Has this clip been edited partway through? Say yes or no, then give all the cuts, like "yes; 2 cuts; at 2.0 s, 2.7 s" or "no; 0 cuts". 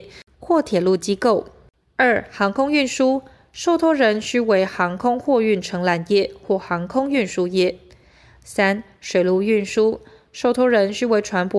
no; 0 cuts